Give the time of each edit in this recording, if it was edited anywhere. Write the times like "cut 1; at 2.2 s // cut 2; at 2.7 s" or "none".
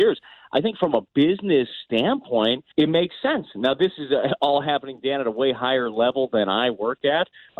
cut 1; at 2.7 s